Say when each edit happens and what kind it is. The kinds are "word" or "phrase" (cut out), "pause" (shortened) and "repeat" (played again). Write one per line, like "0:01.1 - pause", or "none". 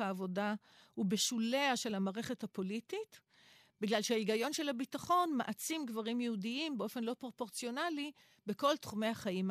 none